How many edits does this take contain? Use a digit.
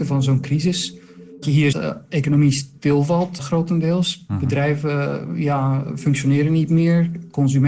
2